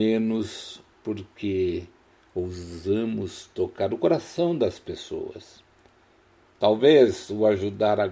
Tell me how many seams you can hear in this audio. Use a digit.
0